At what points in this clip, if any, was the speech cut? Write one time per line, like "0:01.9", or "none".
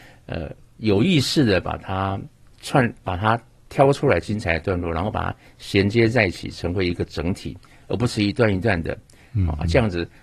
none